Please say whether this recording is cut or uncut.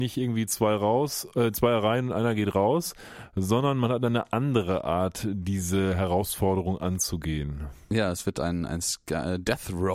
uncut